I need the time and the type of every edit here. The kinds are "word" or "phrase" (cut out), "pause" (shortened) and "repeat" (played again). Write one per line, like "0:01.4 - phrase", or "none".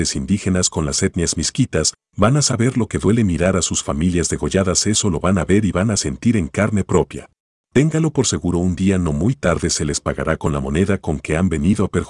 0:07.4 - pause